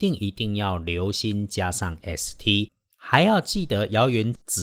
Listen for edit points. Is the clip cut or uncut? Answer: cut